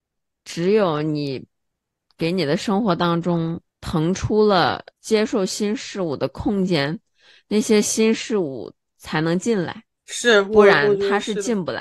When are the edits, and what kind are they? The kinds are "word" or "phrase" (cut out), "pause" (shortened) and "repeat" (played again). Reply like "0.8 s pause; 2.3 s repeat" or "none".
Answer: 3.7 s pause; 4.9 s pause; 10.0 s pause

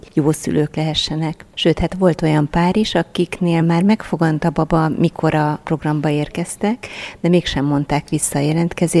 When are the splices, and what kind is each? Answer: none

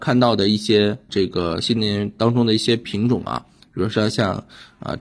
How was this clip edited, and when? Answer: 1.1 s word

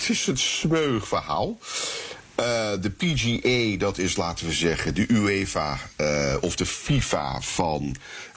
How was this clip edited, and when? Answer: none

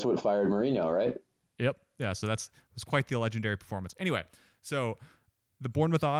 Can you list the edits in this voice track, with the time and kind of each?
none

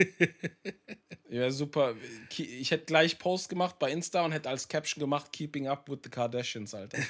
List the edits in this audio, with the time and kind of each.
none

